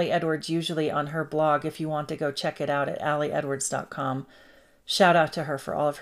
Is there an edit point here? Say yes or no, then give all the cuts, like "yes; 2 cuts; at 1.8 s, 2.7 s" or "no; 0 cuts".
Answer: no; 0 cuts